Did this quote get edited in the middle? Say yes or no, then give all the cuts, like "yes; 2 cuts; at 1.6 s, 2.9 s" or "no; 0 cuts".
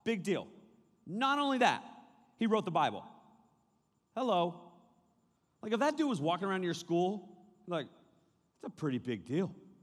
no; 0 cuts